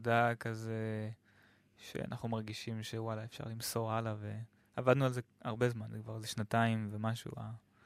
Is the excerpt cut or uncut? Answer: uncut